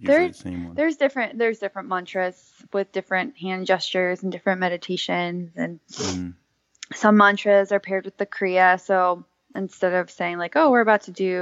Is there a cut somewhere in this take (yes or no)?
no